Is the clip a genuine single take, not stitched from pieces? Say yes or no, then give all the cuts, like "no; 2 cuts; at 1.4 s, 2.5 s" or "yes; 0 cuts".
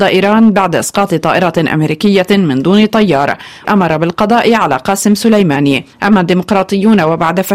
no; 2 cuts; at 3.6 s, 5.9 s